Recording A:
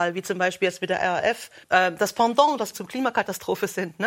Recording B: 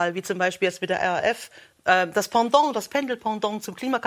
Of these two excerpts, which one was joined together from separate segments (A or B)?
A